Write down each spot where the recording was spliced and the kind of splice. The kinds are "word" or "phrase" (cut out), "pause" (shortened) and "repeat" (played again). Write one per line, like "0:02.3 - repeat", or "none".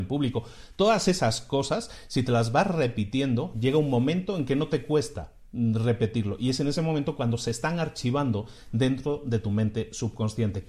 none